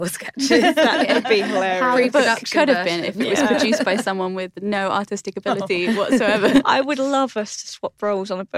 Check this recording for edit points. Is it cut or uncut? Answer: uncut